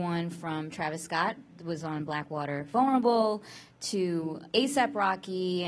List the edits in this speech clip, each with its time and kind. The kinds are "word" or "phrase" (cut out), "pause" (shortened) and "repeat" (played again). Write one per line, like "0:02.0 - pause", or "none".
0:02.7 - word
0:04.5 - pause